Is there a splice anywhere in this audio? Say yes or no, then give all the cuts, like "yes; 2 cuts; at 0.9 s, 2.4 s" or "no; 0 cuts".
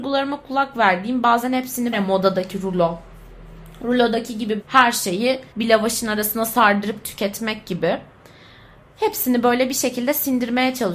yes; 3 cuts; at 1.9 s, 4.6 s, 5.5 s